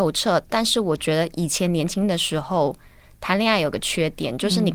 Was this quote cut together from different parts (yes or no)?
no